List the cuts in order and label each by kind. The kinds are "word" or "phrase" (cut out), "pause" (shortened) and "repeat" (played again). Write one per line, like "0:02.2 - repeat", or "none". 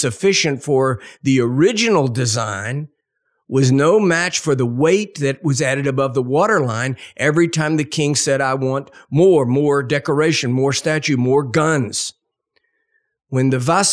none